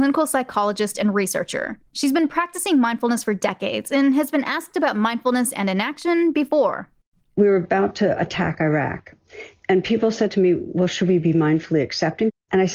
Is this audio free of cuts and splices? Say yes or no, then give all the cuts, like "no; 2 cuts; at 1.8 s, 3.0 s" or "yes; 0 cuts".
yes; 0 cuts